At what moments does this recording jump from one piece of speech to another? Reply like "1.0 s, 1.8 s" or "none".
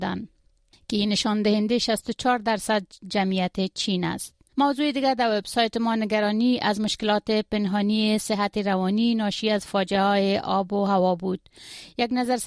4.5 s